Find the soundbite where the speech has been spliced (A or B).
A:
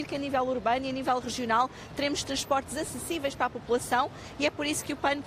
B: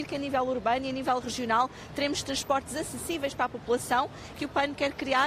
B